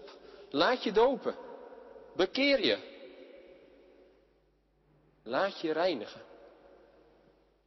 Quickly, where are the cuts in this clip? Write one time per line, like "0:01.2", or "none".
none